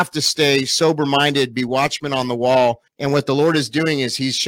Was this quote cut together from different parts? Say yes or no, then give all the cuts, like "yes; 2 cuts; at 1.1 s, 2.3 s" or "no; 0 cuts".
yes; 1 cut; at 2.9 s